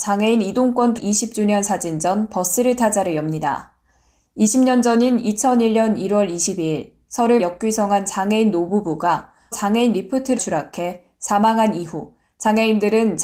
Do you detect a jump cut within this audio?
yes; 4 cuts; at 1.0 s, 7.4 s, 9.5 s, 10.4 s

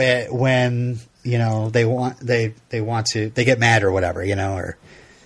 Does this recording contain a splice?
no; 0 cuts

